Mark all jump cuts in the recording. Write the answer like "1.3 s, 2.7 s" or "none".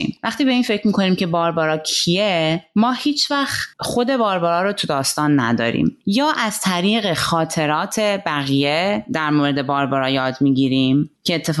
3.7 s

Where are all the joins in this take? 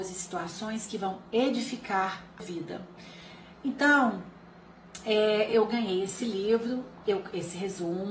2.4 s, 5.5 s

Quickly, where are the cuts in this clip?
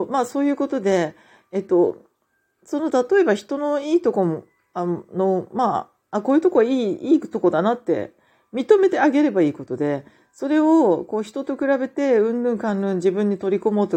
none

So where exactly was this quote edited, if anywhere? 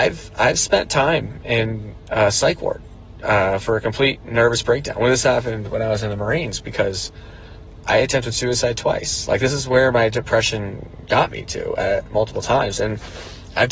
none

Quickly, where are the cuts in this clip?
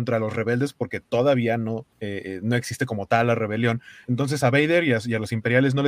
1.9 s

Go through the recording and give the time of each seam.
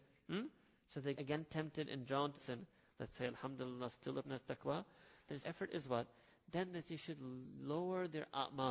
1.1 s, 2.3 s, 4.2 s, 5.4 s

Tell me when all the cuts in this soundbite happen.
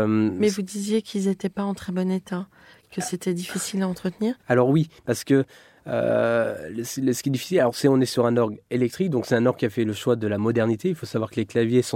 4.4 s, 5.0 s

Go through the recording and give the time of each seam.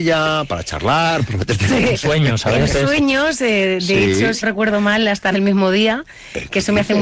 1.7 s, 4.4 s, 5.3 s

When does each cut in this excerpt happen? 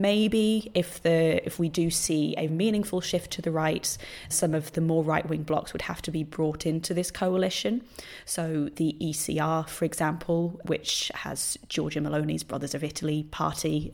2.5 s, 4.3 s, 4.7 s, 10.6 s

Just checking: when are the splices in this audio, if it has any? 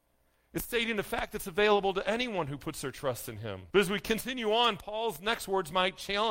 3.7 s

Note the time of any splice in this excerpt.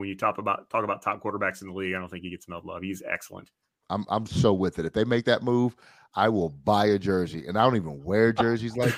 3.7 s

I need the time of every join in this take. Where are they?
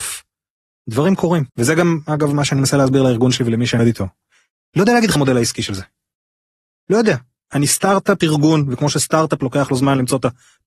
1.5 s, 3.8 s, 5.1 s, 8.2 s

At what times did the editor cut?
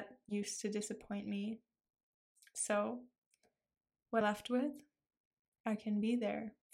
4.2 s

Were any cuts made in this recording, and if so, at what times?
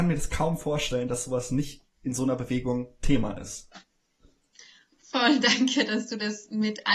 none

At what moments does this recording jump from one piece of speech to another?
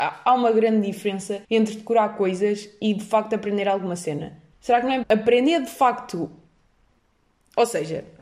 1.4 s, 5.0 s

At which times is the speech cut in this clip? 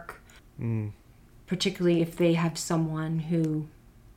none

